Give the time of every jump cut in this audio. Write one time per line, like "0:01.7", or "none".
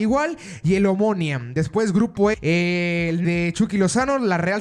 0:02.3
0:03.2